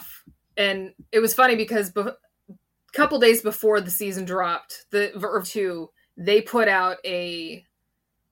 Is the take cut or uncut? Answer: cut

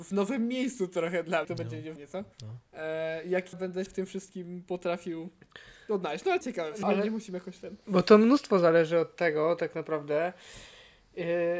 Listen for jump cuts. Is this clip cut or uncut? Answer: cut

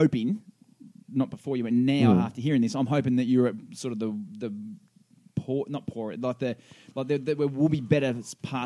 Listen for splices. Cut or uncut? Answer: uncut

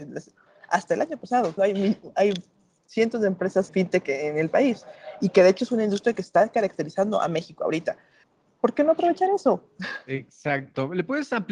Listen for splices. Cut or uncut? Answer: cut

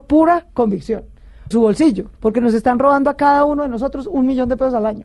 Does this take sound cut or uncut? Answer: cut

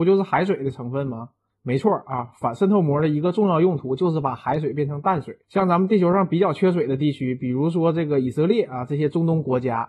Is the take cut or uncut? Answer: cut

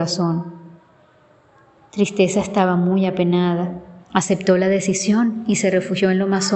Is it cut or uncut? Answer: cut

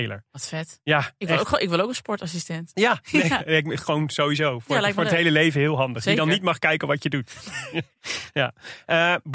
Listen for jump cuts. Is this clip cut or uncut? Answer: uncut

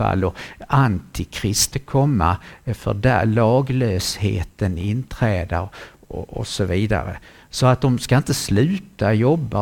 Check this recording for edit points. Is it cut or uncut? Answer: cut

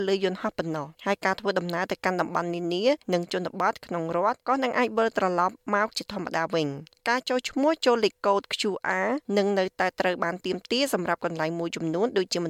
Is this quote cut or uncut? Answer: cut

